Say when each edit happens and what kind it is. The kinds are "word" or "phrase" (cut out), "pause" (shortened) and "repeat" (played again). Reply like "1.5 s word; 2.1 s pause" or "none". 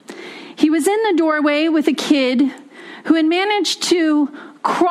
none